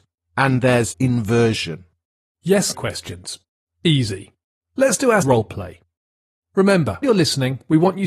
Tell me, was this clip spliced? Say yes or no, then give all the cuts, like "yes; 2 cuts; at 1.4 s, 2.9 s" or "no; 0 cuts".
yes; 4 cuts; at 0.9 s, 2.7 s, 5.2 s, 7.0 s